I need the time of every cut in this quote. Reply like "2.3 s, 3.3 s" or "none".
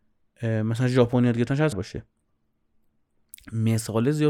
1.7 s